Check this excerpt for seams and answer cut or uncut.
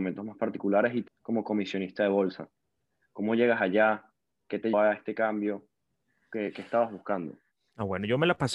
cut